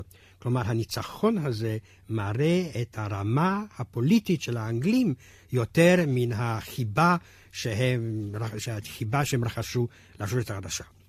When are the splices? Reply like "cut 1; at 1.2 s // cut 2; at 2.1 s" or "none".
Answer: none

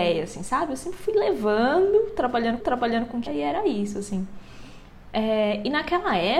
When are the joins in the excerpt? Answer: cut 1; at 2.6 s // cut 2; at 3.3 s

